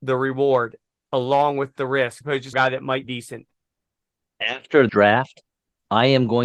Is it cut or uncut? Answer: cut